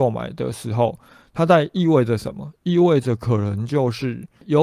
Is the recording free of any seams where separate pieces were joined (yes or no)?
yes